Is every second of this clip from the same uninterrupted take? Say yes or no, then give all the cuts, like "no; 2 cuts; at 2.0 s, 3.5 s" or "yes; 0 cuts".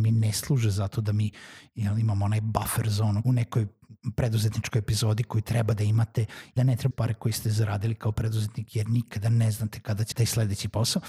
no; 4 cuts; at 3.2 s, 6.6 s, 6.9 s, 10.1 s